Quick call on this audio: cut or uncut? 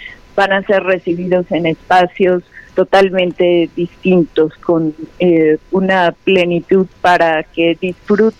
cut